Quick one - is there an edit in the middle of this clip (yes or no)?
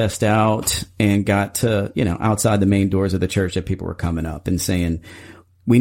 no